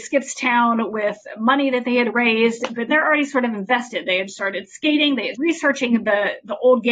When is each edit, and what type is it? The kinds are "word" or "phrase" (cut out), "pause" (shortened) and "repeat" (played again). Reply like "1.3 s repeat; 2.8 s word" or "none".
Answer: 2.9 s word; 5.3 s word